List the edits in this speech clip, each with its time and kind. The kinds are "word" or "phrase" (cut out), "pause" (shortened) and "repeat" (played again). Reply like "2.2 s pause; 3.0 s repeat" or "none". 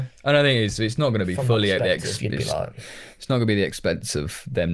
none